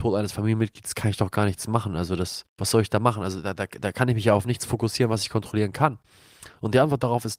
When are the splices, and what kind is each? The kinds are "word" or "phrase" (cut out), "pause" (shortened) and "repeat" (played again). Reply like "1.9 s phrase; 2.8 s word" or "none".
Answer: 2.5 s pause

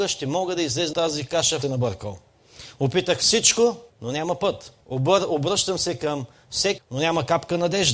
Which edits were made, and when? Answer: 0.9 s word; 1.6 s phrase; 3.9 s pause; 4.8 s pause; 6.8 s word

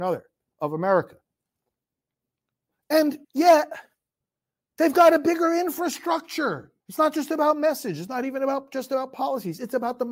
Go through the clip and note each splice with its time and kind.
3.2 s pause; 6.8 s pause

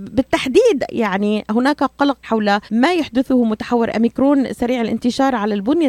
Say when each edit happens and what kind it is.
2.2 s word; 2.7 s pause

